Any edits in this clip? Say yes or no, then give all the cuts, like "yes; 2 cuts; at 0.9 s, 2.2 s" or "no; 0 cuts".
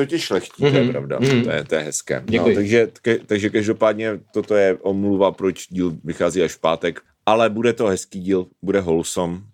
no; 0 cuts